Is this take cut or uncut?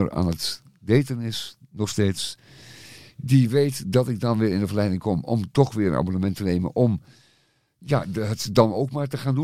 uncut